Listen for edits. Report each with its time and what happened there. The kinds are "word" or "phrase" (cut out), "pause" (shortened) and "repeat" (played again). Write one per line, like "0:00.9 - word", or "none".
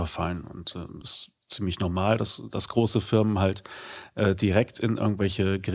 0:01.0 - phrase